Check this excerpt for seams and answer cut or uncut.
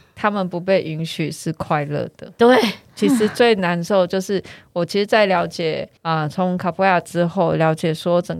cut